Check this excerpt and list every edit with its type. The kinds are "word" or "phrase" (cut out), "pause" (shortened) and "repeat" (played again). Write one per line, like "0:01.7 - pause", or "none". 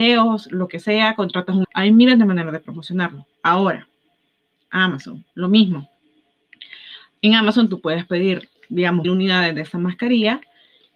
0:01.6 - word
0:03.3 - pause
0:05.3 - pause
0:09.0 - word